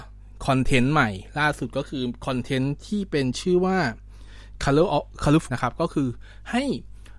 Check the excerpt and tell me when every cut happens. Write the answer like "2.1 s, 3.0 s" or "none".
5.5 s